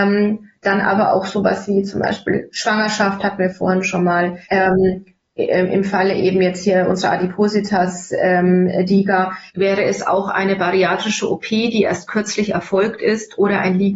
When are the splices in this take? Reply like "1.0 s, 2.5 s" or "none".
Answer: 4.4 s, 9.5 s

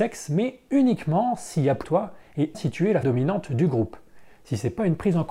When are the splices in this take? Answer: 1.8 s, 2.5 s, 3.0 s

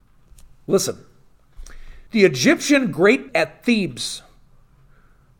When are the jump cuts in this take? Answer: 2.1 s, 3.3 s

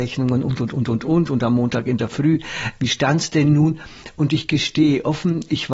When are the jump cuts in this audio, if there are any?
none

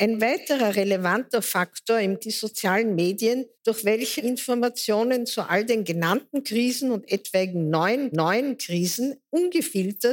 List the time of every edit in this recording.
2.2 s, 3.5 s, 4.2 s, 8.1 s

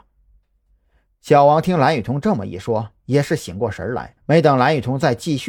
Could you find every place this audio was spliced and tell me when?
4.2 s

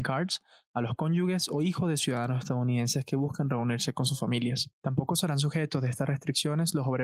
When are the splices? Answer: 4.7 s

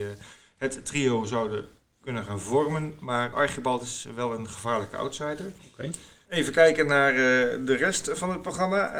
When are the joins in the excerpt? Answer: 3.3 s

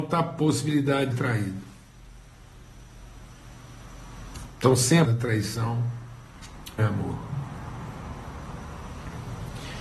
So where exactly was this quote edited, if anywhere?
1.1 s, 5.1 s, 6.8 s

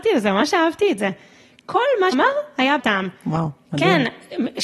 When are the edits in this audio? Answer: 2.1 s, 2.8 s

